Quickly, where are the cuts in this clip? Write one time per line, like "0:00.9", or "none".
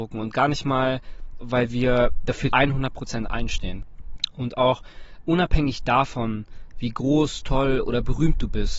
0:01.4
0:02.5